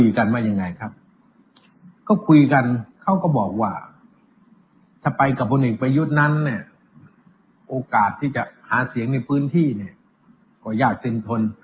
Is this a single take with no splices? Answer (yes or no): yes